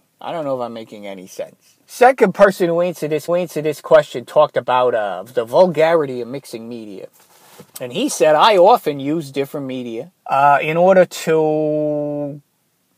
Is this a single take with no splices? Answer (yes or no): no